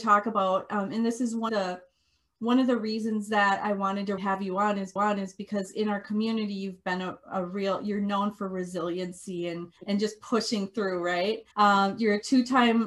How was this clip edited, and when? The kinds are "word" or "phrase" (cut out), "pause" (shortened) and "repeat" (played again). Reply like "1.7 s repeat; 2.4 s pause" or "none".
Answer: 1.5 s word; 4.2 s word; 5.0 s repeat; 9.8 s pause; 11.5 s pause